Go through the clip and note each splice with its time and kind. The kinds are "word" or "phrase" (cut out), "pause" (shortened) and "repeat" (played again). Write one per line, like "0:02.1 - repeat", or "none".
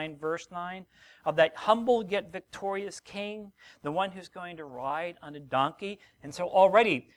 none